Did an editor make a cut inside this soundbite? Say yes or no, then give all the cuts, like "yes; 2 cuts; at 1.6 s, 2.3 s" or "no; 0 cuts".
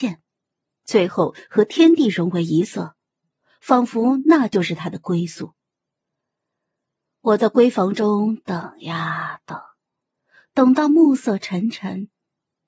no; 0 cuts